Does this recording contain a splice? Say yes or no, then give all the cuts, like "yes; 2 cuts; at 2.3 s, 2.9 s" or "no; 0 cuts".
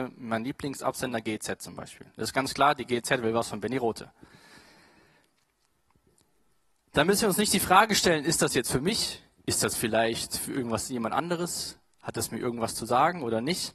no; 0 cuts